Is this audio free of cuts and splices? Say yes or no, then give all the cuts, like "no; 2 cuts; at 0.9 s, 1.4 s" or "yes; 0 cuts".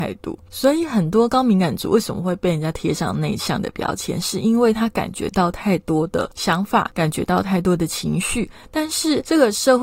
yes; 0 cuts